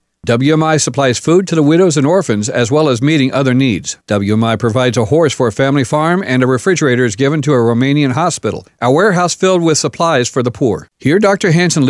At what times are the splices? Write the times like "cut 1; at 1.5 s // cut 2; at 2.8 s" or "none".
cut 1; at 4.0 s // cut 2; at 10.9 s